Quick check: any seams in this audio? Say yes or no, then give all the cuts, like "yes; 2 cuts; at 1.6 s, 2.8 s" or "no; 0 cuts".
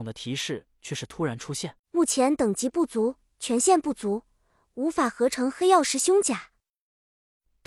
yes; 1 cut; at 1.8 s